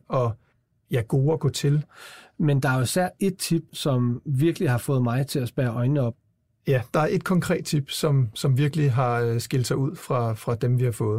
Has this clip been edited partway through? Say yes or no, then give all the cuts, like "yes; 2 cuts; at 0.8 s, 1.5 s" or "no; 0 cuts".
yes; 1 cut; at 3.7 s